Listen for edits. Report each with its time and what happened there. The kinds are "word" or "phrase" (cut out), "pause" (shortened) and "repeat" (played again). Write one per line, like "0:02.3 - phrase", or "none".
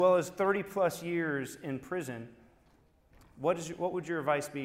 none